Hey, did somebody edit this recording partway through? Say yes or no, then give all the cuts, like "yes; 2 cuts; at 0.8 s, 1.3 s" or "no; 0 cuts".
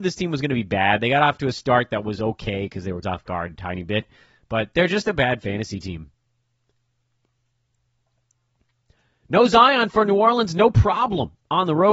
yes; 1 cut; at 3.0 s